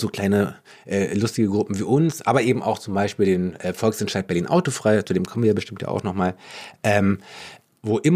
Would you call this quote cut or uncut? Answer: uncut